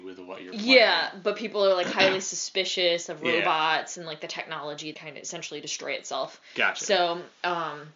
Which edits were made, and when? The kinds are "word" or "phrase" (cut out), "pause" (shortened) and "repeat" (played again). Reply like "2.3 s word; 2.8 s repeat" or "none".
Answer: 4.9 s phrase